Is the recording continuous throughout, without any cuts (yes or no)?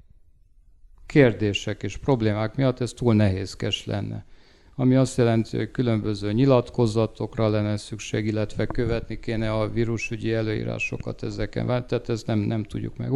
yes